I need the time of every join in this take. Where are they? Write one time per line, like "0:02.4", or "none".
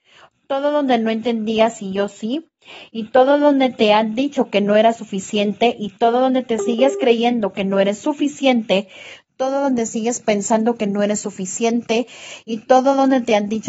none